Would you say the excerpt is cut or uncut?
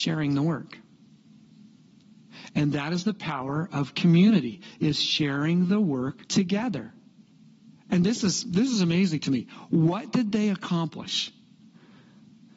cut